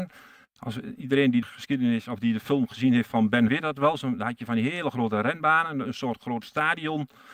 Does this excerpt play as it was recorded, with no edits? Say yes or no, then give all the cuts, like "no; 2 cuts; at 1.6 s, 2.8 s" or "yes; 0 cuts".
no; 2 cuts; at 1.4 s, 3.5 s